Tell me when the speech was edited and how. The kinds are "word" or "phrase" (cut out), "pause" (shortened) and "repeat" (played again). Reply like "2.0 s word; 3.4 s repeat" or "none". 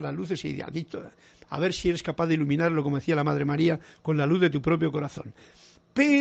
none